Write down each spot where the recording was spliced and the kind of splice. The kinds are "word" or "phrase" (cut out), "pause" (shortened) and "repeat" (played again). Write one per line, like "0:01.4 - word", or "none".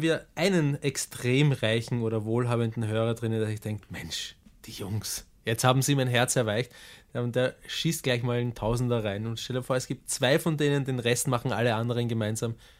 none